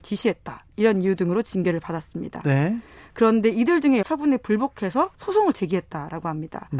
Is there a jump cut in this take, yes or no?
yes